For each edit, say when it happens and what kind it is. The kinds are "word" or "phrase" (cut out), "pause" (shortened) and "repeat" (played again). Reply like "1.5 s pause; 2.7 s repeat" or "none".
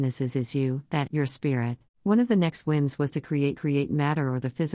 1.1 s word; 1.9 s pause; 3.5 s repeat